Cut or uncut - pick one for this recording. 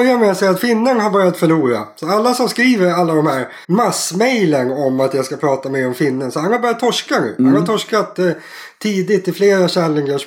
cut